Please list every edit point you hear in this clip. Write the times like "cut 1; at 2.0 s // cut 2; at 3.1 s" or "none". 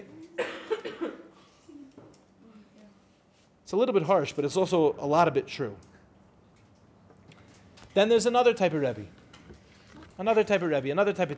cut 1; at 7.9 s // cut 2; at 10.1 s

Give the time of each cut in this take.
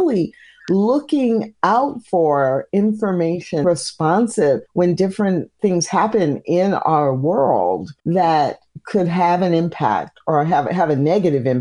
cut 1; at 3.6 s // cut 2; at 4.7 s // cut 3; at 8.0 s

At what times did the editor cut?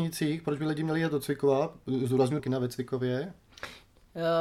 cut 1; at 2.4 s

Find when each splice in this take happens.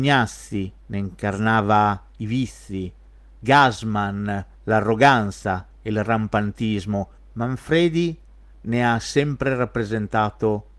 cut 1; at 7.2 s

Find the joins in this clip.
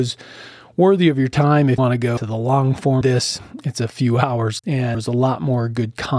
cut 1; at 1.8 s // cut 2; at 2.2 s // cut 3; at 3.0 s // cut 4; at 4.6 s // cut 5; at 4.9 s

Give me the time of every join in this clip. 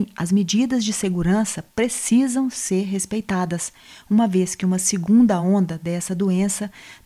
none

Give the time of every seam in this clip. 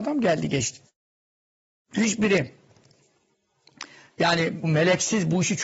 cut 1; at 4.6 s

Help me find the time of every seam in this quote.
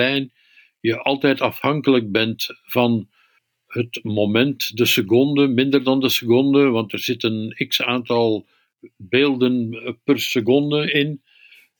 none

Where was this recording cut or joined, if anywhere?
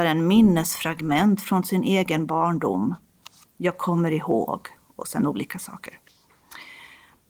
none

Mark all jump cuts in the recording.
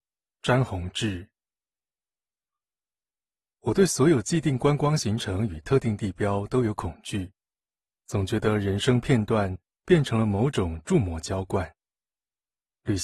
none

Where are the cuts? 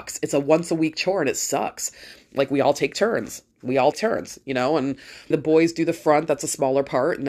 cut 1; at 3.5 s // cut 2; at 3.9 s // cut 3; at 5.3 s

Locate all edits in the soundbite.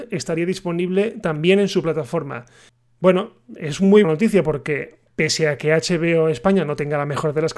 cut 1; at 4.0 s // cut 2; at 5.1 s

